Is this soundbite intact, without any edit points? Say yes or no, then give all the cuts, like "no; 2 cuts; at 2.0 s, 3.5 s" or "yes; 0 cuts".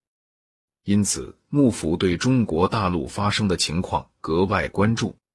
yes; 0 cuts